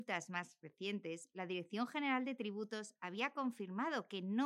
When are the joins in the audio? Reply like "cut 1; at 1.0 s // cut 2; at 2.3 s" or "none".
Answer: none